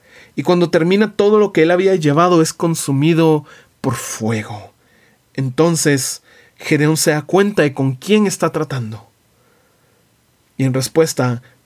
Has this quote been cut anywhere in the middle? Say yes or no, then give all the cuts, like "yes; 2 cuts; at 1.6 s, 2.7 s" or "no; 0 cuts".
no; 0 cuts